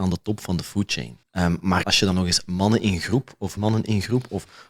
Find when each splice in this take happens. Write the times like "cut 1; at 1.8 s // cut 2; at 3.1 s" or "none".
cut 1; at 1.2 s // cut 2; at 1.8 s // cut 3; at 3.6 s